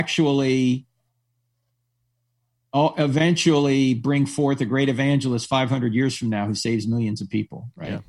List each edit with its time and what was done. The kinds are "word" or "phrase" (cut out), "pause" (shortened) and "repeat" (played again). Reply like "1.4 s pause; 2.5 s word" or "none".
none